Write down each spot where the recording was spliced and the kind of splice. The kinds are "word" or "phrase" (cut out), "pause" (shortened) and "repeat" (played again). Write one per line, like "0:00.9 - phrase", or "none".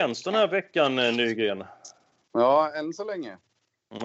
none